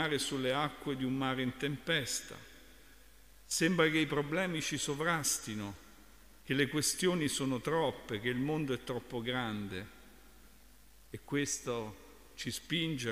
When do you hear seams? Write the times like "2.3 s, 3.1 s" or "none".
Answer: none